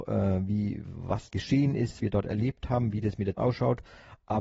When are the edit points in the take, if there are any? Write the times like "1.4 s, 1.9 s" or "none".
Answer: 1.3 s, 2.0 s, 3.4 s